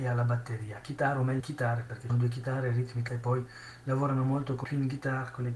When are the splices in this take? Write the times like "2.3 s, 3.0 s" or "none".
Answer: 1.4 s, 2.1 s, 3.1 s, 4.6 s